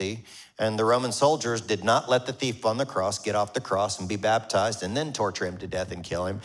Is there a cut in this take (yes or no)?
no